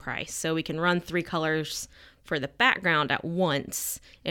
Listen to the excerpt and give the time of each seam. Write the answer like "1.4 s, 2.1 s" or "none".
none